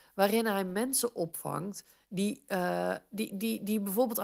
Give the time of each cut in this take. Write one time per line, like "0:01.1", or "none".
none

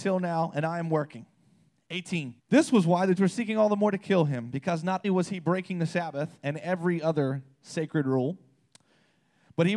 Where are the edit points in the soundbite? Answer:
0:02.4
0:03.2
0:05.0

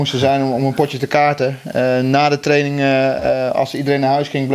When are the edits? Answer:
none

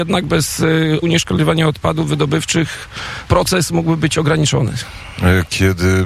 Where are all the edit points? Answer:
0:01.0
0:03.3

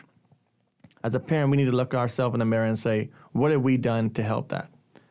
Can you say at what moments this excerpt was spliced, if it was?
none

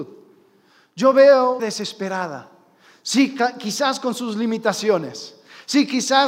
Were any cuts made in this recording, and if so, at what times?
0:01.6

